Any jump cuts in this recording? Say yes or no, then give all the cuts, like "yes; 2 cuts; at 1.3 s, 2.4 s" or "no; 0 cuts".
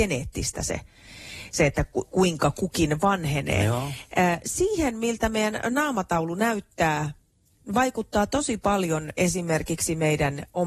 no; 0 cuts